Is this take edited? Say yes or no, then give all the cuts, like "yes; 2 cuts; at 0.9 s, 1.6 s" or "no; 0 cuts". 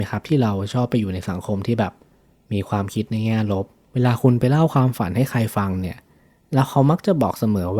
no; 0 cuts